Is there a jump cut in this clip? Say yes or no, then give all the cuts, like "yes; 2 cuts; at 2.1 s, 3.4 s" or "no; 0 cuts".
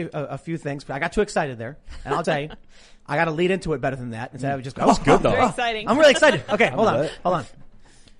yes; 2 cuts; at 2.2 s, 4.8 s